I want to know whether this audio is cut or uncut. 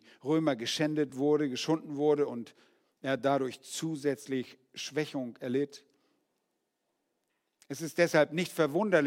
uncut